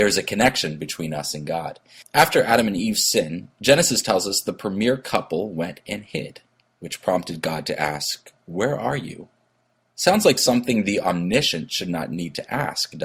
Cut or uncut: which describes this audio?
uncut